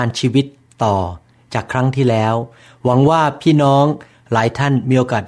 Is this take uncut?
yes; 0 cuts

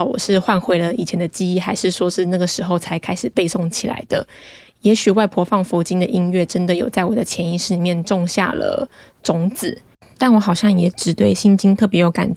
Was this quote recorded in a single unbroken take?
yes; 0 cuts

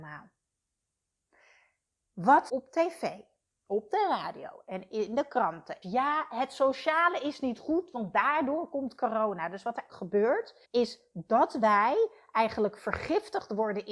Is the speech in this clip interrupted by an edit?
yes; 4 cuts; at 2.5 s, 5.8 s, 9.9 s, 10.6 s

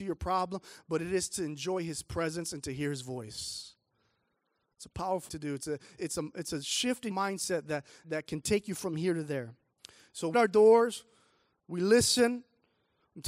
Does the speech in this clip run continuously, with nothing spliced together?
no; 6 cuts; at 5.3 s, 6.0 s, 7.1 s, 8.0 s, 9.8 s, 10.3 s

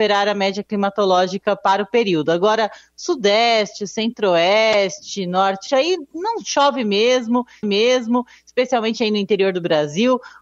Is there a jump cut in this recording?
yes; 2 cuts; at 5.7 s, 7.6 s

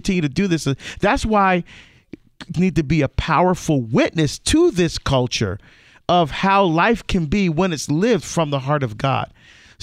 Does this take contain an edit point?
yes; 1 cut; at 2.5 s

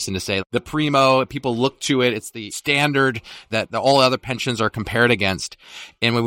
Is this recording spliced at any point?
no; 0 cuts

